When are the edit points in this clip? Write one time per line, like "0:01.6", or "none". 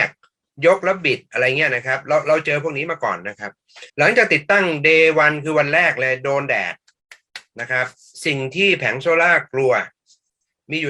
0:03.9

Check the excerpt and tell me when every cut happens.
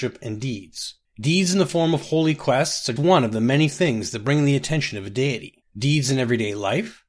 0:03.0

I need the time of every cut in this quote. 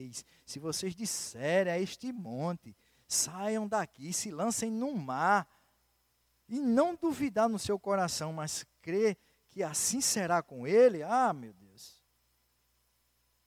none

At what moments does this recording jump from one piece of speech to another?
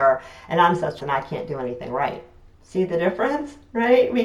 0:01.0
0:02.5

